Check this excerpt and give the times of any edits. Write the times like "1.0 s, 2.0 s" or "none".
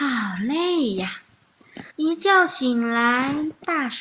1.9 s